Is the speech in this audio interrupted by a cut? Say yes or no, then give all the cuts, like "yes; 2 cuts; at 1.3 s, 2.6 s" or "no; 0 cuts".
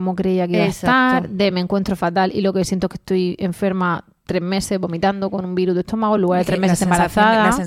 no; 0 cuts